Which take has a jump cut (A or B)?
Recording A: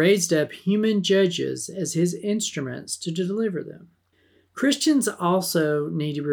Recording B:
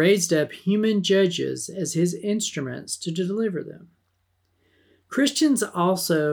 A